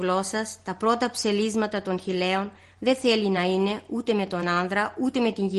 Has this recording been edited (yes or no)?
no